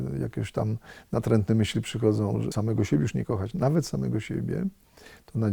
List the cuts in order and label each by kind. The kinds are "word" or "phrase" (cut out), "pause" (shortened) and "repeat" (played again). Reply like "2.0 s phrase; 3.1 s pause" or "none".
2.5 s word